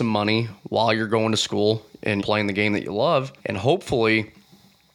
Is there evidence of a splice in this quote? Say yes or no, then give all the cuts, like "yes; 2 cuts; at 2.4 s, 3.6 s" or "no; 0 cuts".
yes; 2 cuts; at 2.2 s, 3.4 s